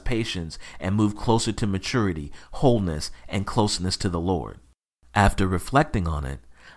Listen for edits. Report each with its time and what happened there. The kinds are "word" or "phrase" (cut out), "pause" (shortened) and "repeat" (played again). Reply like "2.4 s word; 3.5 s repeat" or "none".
none